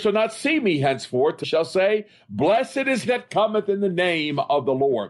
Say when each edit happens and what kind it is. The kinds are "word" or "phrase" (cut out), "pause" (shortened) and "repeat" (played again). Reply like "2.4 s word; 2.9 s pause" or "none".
1.4 s word; 3.1 s word